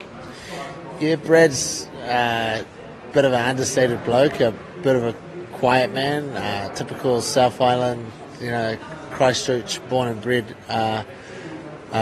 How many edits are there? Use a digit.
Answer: 0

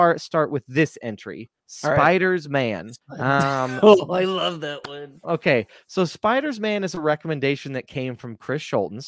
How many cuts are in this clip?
2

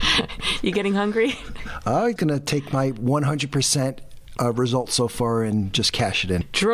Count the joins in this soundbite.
1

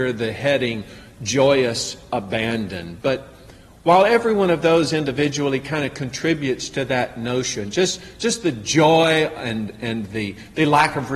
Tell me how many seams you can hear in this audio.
0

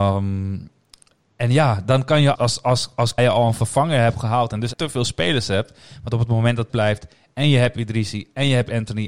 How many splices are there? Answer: 4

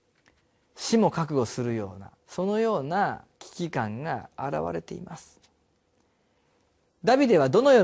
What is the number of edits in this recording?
2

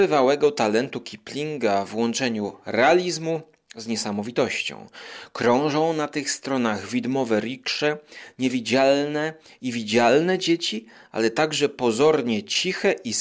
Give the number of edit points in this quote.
0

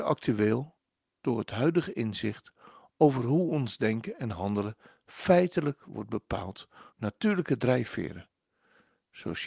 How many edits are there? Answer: 1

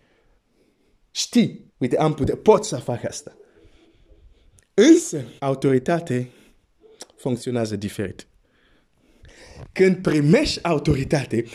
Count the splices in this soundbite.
2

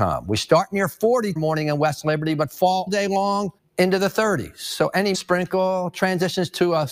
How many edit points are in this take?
4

